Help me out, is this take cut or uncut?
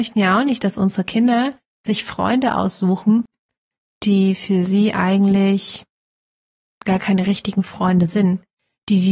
uncut